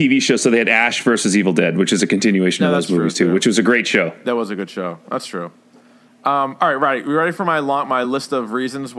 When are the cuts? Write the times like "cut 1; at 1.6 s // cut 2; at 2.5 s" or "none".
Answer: none